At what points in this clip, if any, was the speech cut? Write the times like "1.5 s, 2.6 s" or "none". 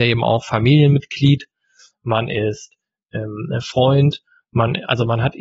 none